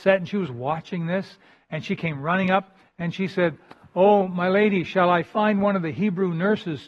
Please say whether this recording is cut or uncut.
uncut